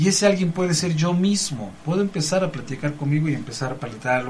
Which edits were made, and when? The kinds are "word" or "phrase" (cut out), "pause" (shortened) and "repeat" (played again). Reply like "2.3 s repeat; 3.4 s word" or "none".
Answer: none